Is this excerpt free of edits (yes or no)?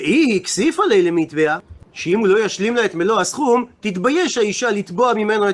yes